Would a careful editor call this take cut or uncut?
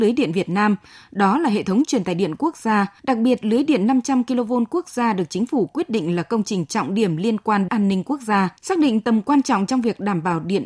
cut